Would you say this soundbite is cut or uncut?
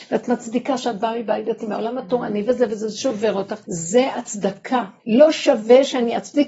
cut